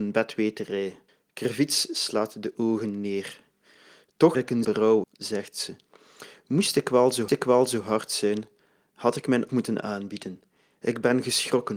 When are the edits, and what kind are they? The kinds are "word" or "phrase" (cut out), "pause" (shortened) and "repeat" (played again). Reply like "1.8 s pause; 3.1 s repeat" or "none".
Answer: 1.1 s pause; 4.3 s word; 4.6 s phrase; 5.0 s phrase; 7.3 s repeat; 9.5 s phrase